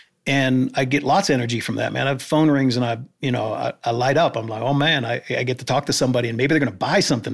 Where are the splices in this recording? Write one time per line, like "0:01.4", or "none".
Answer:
none

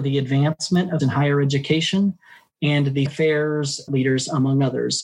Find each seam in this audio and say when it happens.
0:01.0
0:03.1
0:03.9

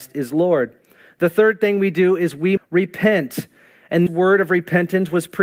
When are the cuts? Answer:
0:02.6
0:04.1

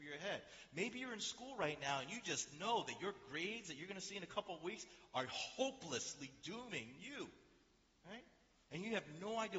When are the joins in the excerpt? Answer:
none

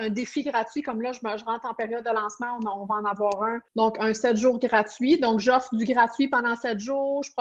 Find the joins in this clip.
0:03.7

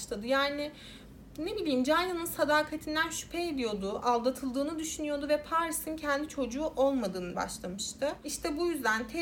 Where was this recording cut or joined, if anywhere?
0:07.3

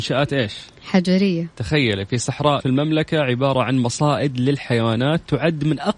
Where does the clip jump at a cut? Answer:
0:01.5
0:02.6

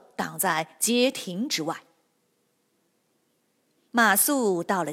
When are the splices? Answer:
none

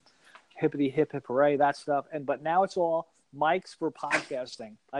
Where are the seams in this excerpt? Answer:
none

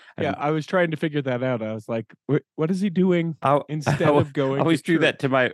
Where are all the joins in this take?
none

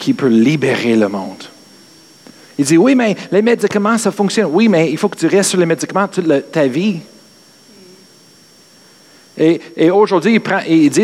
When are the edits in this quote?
none

